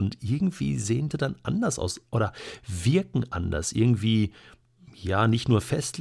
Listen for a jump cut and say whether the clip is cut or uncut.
cut